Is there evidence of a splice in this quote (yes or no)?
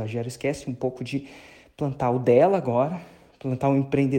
no